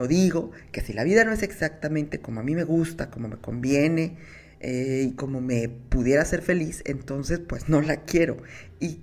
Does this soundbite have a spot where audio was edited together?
no; 0 cuts

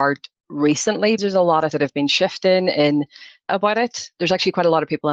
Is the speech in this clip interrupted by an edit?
yes; 3 cuts; at 1.2 s, 1.7 s, 3.5 s

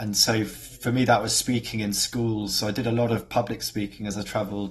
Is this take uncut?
yes; 0 cuts

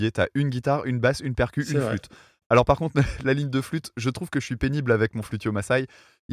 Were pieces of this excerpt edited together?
no; 0 cuts

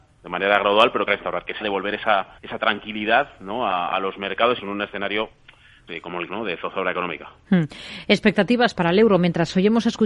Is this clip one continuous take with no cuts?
no; 7 cuts; at 1.1 s, 1.6 s, 2.4 s, 4.6 s, 5.9 s, 6.3 s, 8.8 s

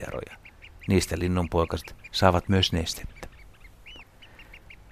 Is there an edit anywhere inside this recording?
no; 0 cuts

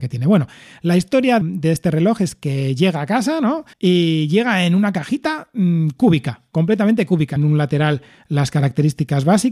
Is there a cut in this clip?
yes; 3 cuts; at 1.4 s, 3.7 s, 7.4 s

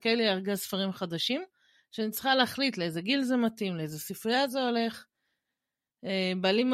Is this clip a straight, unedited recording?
yes; 0 cuts

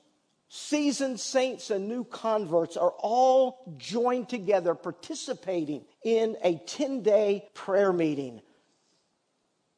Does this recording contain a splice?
yes; 2 cuts; at 5.9 s, 7.5 s

